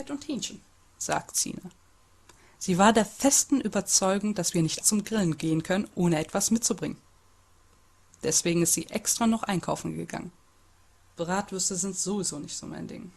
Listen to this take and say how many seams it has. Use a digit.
1